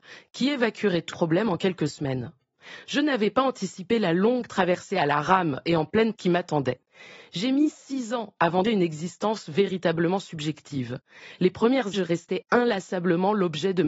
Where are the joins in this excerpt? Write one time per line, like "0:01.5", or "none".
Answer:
0:01.1
0:06.2
0:08.6
0:11.9